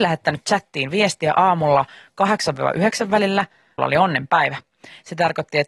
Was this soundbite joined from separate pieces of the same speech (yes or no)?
yes